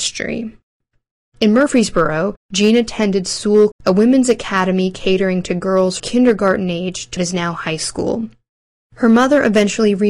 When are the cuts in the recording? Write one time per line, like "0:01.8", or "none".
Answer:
0:03.7
0:06.0
0:07.2